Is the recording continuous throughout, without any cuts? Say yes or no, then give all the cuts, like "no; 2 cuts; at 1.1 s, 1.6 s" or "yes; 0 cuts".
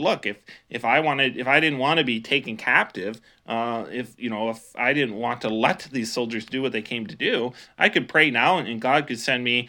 yes; 0 cuts